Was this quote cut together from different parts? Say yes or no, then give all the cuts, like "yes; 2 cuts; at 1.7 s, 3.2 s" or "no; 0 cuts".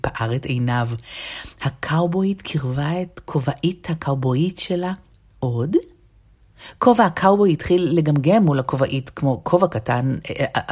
no; 0 cuts